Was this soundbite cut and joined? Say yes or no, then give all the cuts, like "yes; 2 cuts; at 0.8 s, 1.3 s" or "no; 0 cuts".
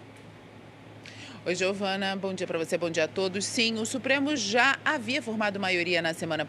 no; 0 cuts